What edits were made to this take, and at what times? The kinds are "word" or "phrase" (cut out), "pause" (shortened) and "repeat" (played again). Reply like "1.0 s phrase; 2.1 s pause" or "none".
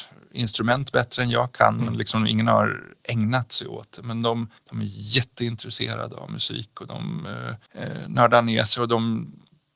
4.6 s pause; 7.7 s pause